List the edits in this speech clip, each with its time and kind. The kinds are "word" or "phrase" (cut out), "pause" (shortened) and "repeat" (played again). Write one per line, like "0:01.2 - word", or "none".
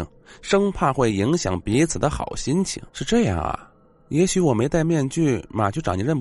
0:02.9 - pause